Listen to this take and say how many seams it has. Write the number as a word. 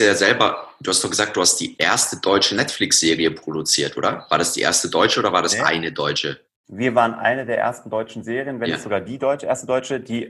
one